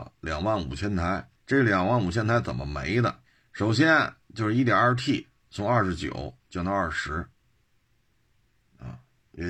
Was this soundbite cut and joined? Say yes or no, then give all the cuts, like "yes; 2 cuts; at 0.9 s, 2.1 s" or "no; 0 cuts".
yes; 2 cuts; at 1.4 s, 3.2 s